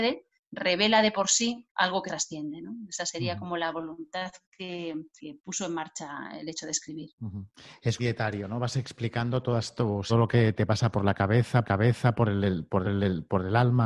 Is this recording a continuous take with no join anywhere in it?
no; 8 cuts; at 1.7 s, 2.1 s, 5.2 s, 7.1 s, 8.0 s, 10.1 s, 11.6 s, 12.8 s

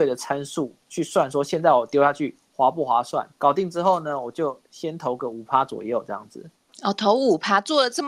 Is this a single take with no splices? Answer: no; 2 cuts; at 3.3 s, 4.6 s

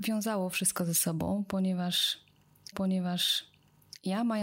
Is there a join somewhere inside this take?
yes; 1 cut; at 2.7 s

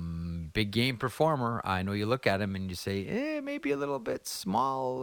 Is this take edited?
no; 0 cuts

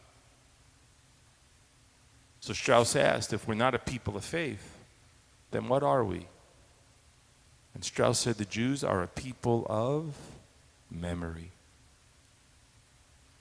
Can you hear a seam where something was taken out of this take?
no; 0 cuts

